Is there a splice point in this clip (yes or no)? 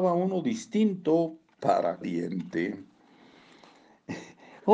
yes